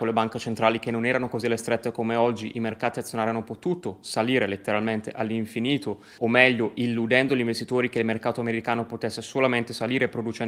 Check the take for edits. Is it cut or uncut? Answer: uncut